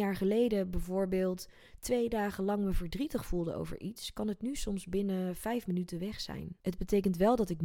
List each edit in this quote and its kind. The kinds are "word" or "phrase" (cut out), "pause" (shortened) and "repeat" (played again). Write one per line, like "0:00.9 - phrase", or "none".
0:06.6 - pause